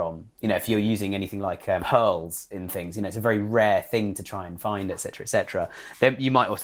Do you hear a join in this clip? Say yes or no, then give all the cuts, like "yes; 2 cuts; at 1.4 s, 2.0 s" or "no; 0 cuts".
no; 0 cuts